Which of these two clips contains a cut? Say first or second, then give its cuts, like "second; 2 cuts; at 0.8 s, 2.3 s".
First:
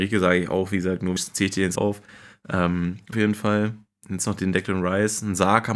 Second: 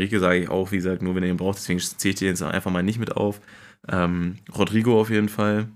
first; 3 cuts; at 1.2 s, 1.8 s, 3.1 s